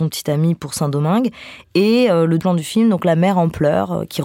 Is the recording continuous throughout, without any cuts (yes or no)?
no